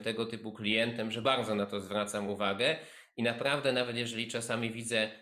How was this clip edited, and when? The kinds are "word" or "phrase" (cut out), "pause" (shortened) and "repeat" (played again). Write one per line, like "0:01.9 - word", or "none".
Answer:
none